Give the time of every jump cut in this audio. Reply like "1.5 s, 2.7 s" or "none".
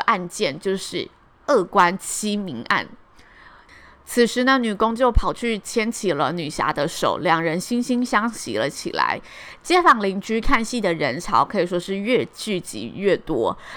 none